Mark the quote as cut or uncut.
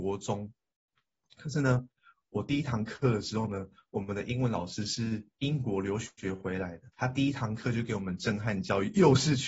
cut